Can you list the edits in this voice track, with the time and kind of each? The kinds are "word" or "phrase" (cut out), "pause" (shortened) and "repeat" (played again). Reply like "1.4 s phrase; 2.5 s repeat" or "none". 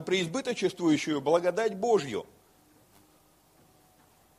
none